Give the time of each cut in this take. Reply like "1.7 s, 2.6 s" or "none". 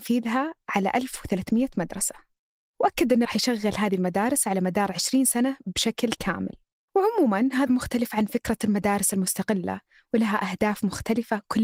3.2 s, 7.7 s